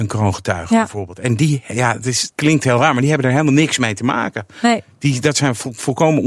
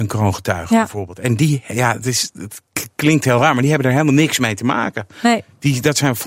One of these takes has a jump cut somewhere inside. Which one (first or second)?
first